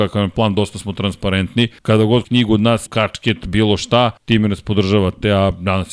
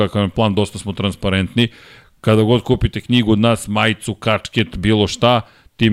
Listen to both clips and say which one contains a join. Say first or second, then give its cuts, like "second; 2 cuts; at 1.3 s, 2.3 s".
first; 4 cuts; at 1.8 s, 2.2 s, 2.9 s, 4.2 s